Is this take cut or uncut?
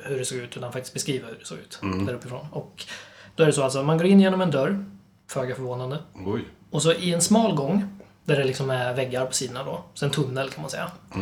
uncut